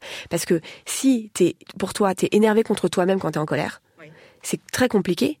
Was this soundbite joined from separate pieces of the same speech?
no; 0 cuts

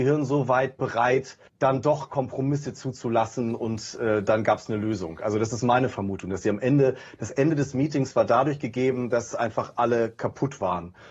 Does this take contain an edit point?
yes; 1 cut; at 1.5 s

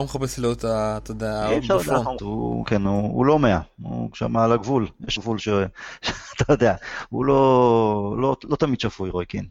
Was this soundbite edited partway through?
yes; 3 cuts; at 2.2 s, 2.6 s, 5.2 s

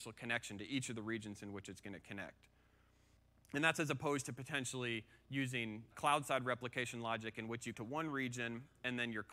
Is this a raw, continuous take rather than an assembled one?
no; 3 cuts; at 3.2 s, 5.9 s, 7.7 s

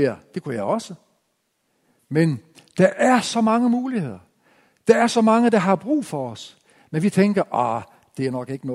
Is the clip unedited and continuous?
yes; 0 cuts

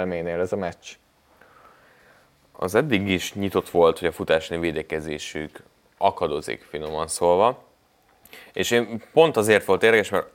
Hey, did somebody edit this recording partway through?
no; 0 cuts

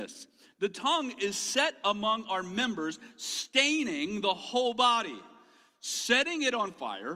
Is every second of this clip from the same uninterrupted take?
yes; 0 cuts

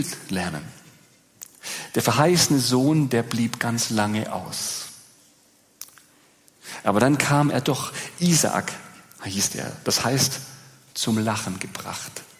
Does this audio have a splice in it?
no; 0 cuts

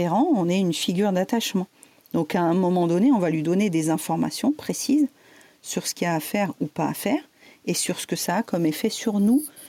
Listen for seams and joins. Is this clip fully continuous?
yes; 0 cuts

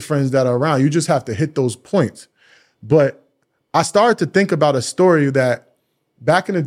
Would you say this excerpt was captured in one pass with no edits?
yes; 0 cuts

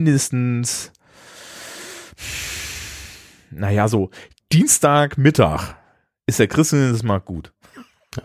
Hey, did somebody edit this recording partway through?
no; 0 cuts

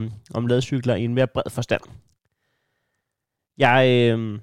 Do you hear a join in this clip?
no; 0 cuts

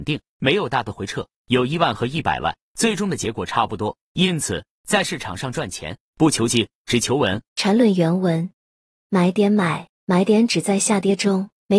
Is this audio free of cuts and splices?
no; 1 cut; at 7.5 s

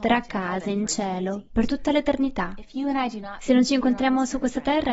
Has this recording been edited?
no; 0 cuts

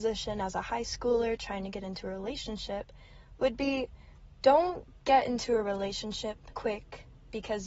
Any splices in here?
yes; 1 cut; at 6.5 s

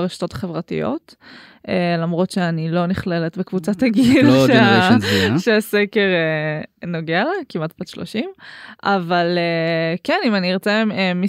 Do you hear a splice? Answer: no; 0 cuts

